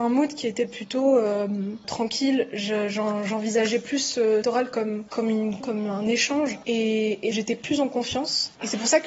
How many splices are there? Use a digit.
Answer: 3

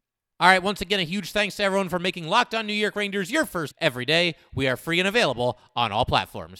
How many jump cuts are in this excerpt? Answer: 1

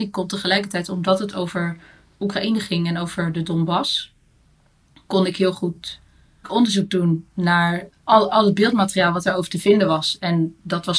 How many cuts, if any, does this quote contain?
1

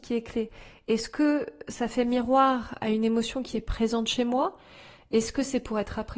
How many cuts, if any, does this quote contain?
0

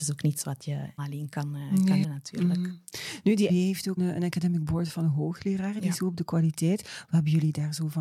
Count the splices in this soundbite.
5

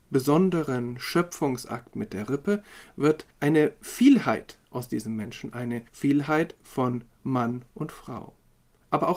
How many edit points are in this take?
2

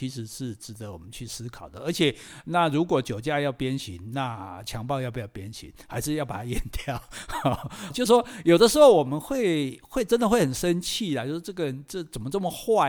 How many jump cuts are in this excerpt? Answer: 1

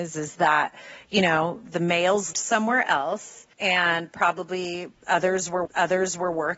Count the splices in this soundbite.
3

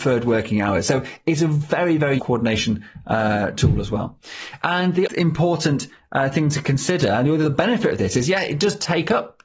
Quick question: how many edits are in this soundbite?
2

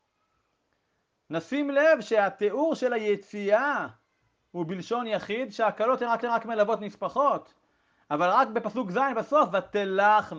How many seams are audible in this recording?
1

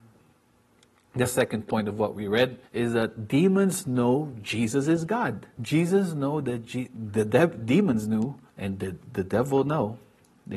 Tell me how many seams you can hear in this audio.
3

